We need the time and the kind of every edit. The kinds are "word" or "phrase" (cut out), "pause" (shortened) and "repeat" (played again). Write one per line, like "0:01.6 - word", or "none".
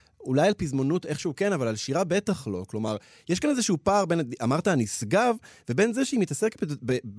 none